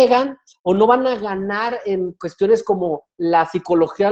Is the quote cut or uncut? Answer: uncut